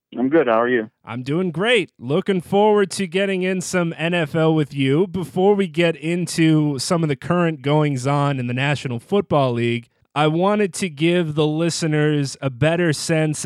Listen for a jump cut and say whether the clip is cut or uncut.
uncut